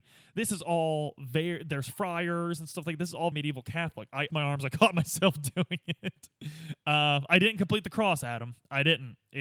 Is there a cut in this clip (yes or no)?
yes